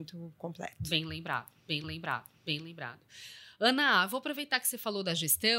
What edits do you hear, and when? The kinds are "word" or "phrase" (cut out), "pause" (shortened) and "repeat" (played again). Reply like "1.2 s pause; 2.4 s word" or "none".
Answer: 1.8 s repeat